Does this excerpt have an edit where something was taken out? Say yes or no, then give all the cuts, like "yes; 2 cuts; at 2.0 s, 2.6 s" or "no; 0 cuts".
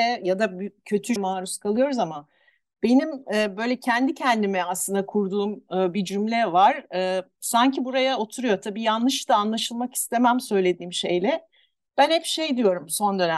yes; 1 cut; at 1.2 s